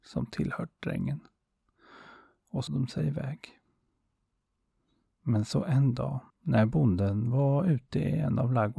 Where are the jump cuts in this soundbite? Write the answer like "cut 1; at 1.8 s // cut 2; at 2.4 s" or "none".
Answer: cut 1; at 2.7 s // cut 2; at 6.3 s